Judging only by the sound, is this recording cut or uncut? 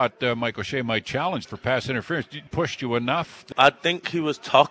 cut